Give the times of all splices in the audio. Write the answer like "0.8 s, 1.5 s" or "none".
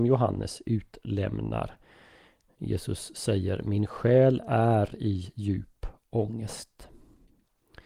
none